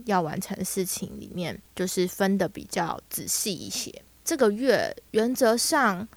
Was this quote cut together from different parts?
yes; 1 cut; at 1.6 s

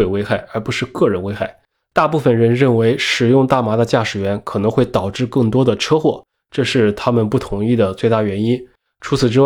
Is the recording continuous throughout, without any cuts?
yes; 0 cuts

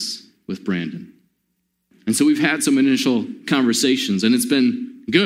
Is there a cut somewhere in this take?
no; 0 cuts

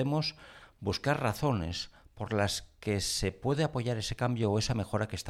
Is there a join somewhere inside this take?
no; 0 cuts

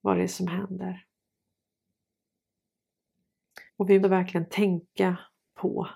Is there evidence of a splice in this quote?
yes; 2 cuts; at 3.7 s, 4.0 s

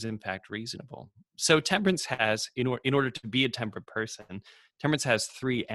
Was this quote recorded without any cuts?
yes; 0 cuts

